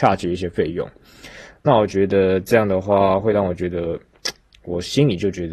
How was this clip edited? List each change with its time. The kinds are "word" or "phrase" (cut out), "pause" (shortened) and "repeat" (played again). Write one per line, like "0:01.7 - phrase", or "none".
none